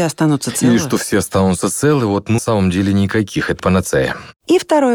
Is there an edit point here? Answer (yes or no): yes